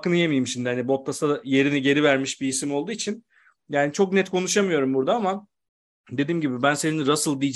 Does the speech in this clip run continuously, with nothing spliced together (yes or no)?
yes